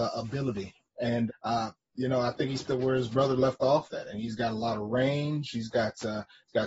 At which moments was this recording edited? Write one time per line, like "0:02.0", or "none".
0:01.3
0:02.7